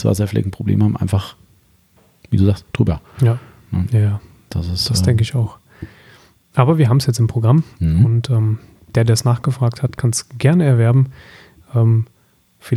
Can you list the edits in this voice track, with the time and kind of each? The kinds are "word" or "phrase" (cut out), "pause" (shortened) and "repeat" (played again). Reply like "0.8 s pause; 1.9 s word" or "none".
none